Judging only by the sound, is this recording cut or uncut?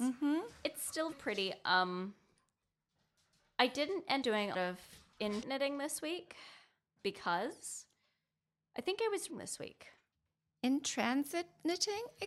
cut